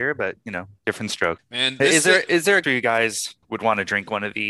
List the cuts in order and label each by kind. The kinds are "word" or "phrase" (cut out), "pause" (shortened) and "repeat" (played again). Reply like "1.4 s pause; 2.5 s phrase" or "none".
2.6 s word; 3.4 s pause